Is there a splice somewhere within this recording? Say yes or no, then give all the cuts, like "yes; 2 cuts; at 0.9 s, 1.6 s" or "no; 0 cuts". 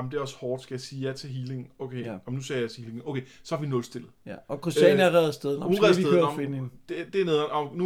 no; 0 cuts